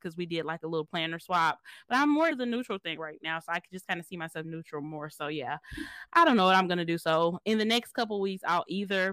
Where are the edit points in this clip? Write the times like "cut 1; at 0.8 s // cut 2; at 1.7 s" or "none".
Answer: cut 1; at 2.3 s // cut 2; at 4.4 s